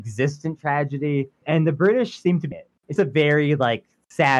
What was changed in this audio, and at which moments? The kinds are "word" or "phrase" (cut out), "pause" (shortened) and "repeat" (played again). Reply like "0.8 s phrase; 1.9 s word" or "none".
2.5 s phrase; 3.0 s word